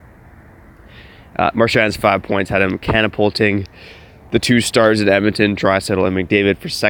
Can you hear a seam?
no; 0 cuts

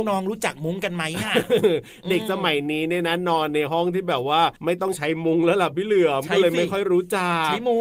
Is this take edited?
yes; 1 cut; at 4.6 s

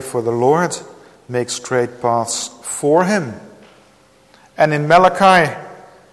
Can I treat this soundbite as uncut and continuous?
yes; 0 cuts

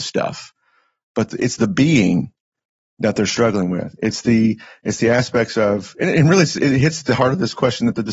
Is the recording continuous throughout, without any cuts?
yes; 0 cuts

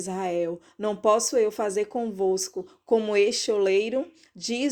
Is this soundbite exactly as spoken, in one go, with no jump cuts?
yes; 0 cuts

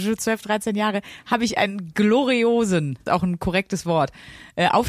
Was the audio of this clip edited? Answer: yes; 1 cut; at 3.1 s

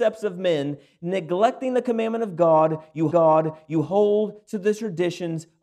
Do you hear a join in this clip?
yes; 1 cut; at 3.1 s

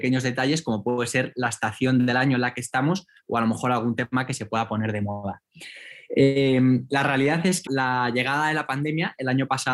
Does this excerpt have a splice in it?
yes; 1 cut; at 7.7 s

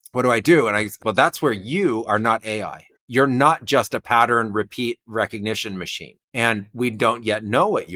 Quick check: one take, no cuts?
no; 3 cuts; at 1.0 s, 3.0 s, 6.2 s

